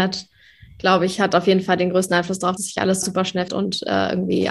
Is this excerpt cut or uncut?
cut